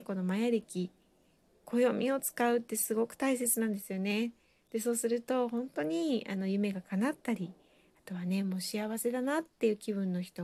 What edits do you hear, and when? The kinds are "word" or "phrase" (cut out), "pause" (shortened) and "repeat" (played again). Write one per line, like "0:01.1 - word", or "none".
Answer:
none